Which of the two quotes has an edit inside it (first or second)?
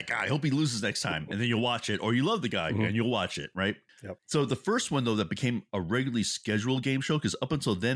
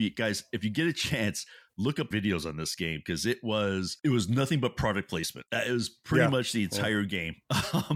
second